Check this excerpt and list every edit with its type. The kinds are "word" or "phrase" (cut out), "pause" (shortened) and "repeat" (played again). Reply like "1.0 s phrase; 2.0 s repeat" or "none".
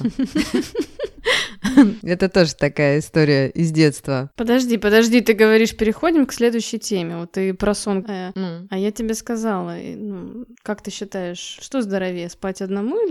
8.0 s word; 10.5 s pause